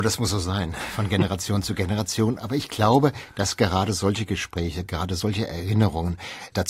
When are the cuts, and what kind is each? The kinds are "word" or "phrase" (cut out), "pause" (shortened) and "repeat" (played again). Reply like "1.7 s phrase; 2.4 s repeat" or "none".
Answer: none